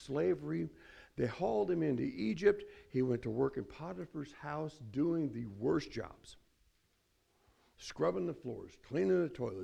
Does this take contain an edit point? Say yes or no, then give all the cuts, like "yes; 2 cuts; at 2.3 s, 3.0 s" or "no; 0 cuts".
no; 0 cuts